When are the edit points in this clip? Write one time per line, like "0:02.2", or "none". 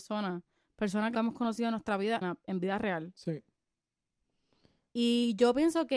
0:01.1
0:02.2